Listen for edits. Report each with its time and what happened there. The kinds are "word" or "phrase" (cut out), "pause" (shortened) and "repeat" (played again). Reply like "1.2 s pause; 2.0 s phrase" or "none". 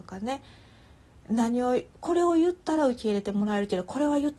1.9 s pause